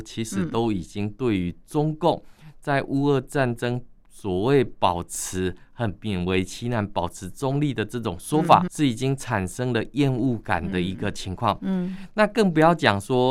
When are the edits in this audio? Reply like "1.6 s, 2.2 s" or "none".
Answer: 8.7 s